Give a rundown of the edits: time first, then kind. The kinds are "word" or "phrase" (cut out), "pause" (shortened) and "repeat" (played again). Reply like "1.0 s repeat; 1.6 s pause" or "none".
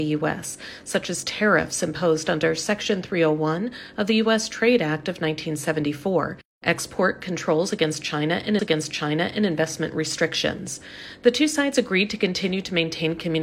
8.6 s repeat